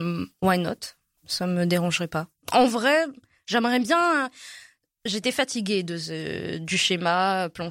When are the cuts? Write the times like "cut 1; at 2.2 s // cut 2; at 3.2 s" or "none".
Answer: none